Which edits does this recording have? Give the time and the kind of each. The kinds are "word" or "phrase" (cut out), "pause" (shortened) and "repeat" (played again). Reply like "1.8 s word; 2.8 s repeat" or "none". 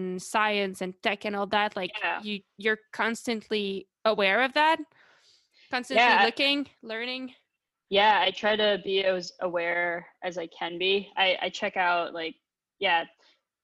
3.9 s pause

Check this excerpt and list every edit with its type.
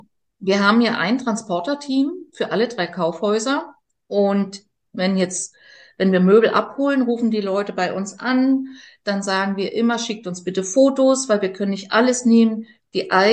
none

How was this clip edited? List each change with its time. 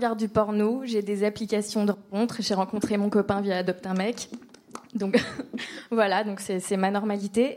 none

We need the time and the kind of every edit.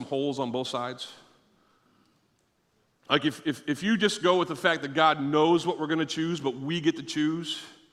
none

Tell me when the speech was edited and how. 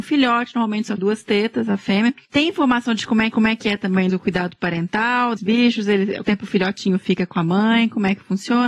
1.0 s word; 3.3 s repeat; 4.1 s word; 5.4 s word; 6.2 s word

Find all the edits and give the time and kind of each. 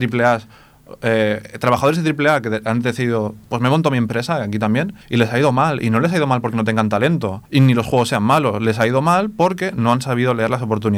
5.0 s pause; 7.4 s pause

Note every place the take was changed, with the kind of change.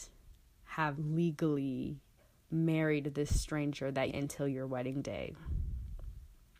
0.9 s word; 2.2 s pause; 4.1 s phrase

